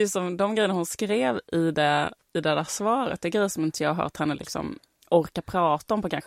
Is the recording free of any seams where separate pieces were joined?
yes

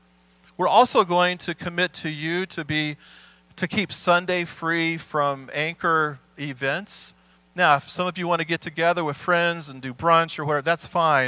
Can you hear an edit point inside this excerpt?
no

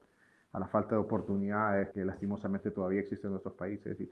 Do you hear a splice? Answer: yes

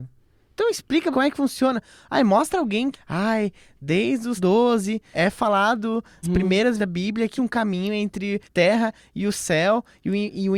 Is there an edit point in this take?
yes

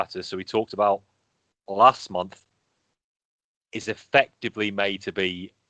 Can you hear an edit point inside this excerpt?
no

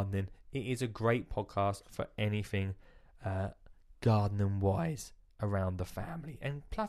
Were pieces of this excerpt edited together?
no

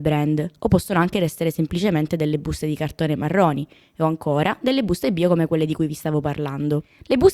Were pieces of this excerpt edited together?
no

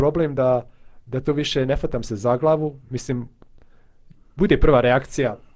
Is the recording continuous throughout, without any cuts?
yes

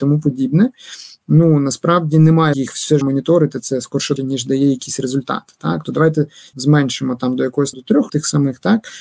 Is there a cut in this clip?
yes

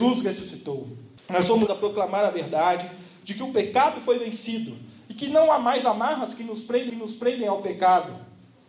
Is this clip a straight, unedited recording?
no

